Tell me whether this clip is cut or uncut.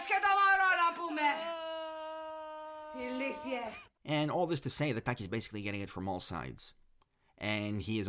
uncut